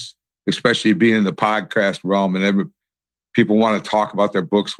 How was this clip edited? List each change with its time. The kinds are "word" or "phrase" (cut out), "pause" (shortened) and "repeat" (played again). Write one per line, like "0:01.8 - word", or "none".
none

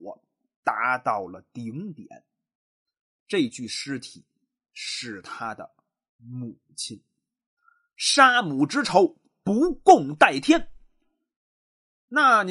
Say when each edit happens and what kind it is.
none

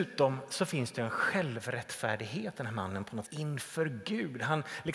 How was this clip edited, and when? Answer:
0:02.5 - word
0:03.2 - word

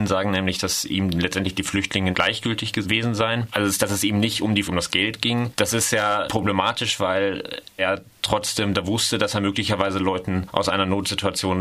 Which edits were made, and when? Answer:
0:04.6 - phrase
0:07.8 - word

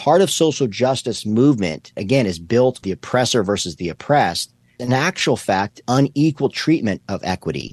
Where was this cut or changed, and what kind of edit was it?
0:02.0 - word
0:02.8 - word
0:04.8 - word
0:05.8 - word

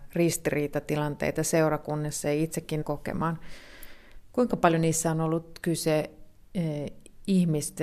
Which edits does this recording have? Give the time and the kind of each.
0:02.8 - phrase

